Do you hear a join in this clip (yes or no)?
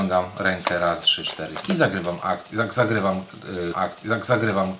yes